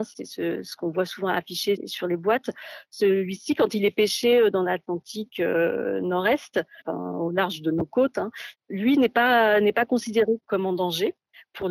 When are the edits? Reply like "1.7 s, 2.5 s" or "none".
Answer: none

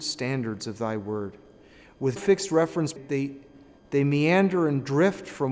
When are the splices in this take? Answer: 2.2 s, 3.0 s

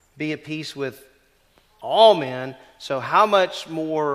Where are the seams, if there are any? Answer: none

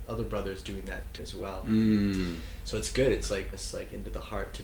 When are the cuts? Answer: 1.2 s, 3.5 s

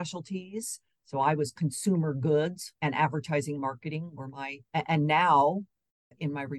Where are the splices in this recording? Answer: 2.8 s, 4.7 s

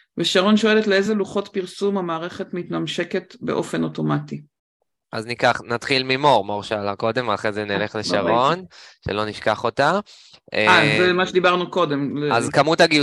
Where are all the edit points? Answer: none

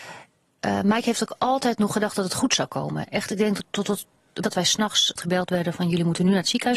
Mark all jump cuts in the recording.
3.6 s, 4.4 s, 5.2 s

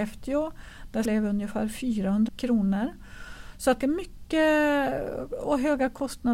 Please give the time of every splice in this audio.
1.0 s, 2.3 s, 3.8 s

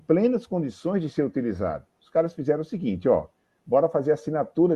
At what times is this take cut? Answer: none

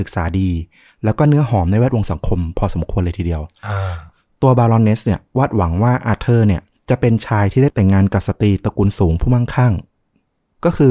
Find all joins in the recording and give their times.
none

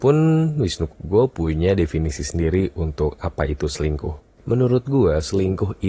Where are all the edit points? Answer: 0.9 s

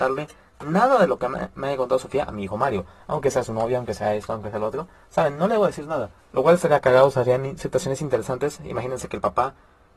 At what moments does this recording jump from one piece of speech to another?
6.2 s

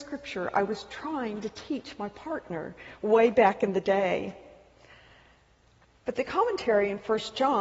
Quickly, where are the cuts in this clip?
none

